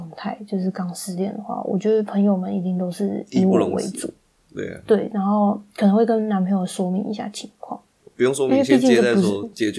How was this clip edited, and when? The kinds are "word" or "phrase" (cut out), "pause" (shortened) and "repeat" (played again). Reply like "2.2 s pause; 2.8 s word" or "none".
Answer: 4.2 s pause; 7.9 s pause